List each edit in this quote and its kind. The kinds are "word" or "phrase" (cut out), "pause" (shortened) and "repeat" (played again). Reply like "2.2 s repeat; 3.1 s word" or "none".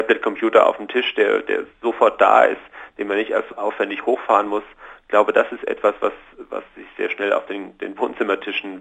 none